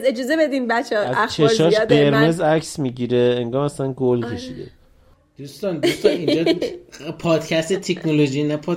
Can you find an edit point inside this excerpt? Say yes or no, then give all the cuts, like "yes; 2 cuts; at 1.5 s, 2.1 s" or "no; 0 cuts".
no; 0 cuts